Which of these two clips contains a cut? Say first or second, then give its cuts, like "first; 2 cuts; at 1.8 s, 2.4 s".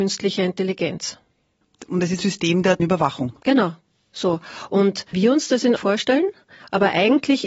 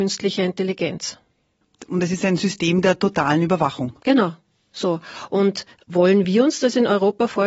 first; 4 cuts; at 2.2 s, 2.8 s, 5.1 s, 5.8 s